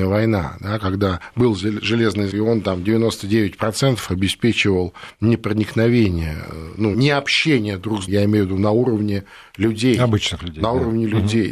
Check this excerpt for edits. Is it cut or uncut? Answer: cut